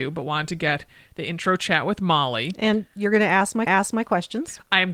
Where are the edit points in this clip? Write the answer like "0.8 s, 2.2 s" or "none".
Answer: 3.7 s